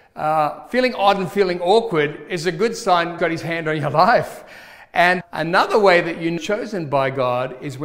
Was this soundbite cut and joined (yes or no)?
yes